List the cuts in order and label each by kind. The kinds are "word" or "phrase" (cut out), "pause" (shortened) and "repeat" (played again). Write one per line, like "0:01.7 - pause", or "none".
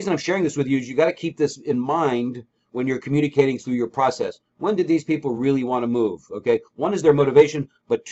none